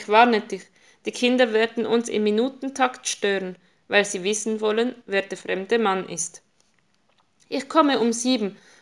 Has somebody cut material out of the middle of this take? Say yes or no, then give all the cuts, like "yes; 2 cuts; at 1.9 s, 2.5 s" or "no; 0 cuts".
no; 0 cuts